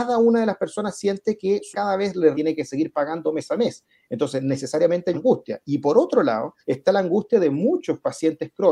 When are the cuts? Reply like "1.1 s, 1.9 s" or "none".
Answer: 1.7 s, 2.3 s, 5.1 s, 6.6 s